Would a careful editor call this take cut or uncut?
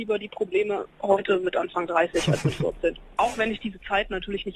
uncut